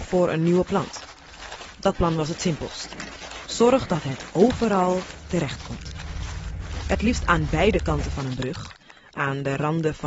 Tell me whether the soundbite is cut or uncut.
uncut